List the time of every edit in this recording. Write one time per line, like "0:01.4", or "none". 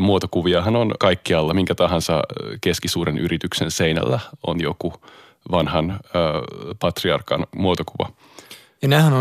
none